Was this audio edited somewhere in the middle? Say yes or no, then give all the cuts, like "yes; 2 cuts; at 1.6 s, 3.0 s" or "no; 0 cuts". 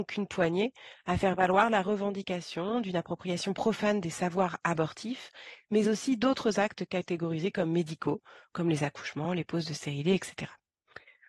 no; 0 cuts